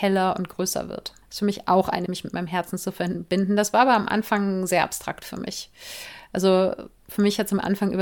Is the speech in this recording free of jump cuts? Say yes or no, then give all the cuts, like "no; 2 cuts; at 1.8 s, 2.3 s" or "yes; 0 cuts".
no; 2 cuts; at 1.2 s, 2.1 s